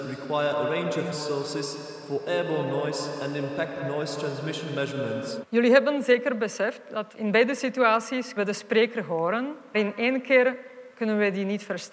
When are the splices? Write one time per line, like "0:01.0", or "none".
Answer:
0:01.1
0:08.4
0:09.7